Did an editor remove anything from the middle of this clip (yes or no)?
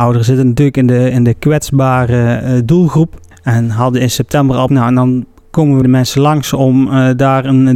yes